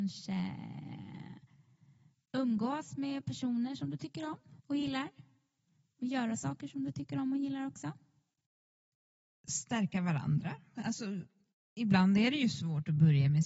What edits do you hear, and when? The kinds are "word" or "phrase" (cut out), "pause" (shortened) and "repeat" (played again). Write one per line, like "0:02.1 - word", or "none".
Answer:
0:04.6 - pause